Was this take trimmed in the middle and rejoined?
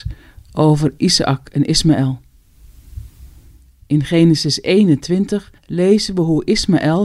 yes; 1 cut; at 5.6 s

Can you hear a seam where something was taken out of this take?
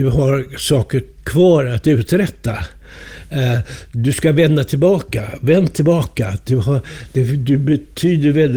no; 0 cuts

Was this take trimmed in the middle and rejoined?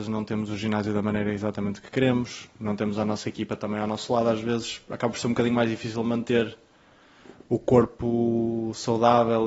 no; 0 cuts

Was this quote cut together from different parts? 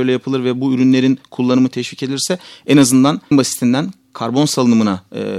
yes; 1 cut; at 3.3 s

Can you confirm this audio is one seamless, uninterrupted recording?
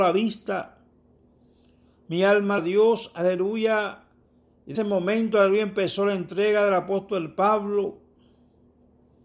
no; 2 cuts; at 2.6 s, 4.7 s

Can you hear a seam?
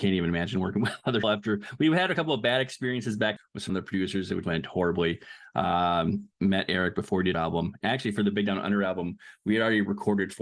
yes; 6 cuts; at 1.2 s, 3.4 s, 3.7 s, 4.4 s, 6.3 s, 7.3 s

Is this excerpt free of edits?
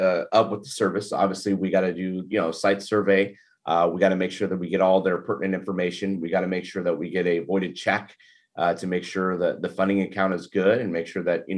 yes; 0 cuts

